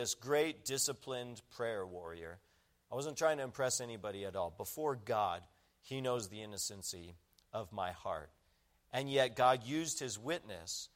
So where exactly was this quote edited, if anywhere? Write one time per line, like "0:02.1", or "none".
none